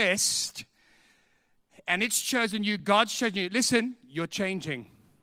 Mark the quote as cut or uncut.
uncut